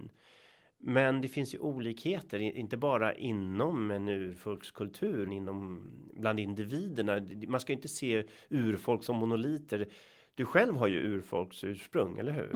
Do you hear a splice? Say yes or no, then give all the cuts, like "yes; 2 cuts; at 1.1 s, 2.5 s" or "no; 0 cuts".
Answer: yes; 1 cut; at 5.2 s